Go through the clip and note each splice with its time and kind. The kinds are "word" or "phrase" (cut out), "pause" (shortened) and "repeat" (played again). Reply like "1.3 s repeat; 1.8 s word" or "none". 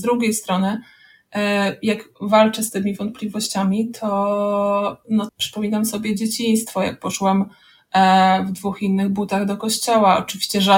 5.3 s word